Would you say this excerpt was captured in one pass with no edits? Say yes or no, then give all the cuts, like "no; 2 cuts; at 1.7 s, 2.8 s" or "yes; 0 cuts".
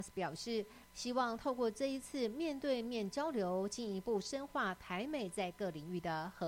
yes; 0 cuts